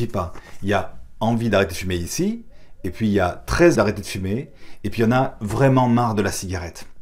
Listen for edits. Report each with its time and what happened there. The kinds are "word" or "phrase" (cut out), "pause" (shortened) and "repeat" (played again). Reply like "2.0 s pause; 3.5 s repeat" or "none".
3.7 s word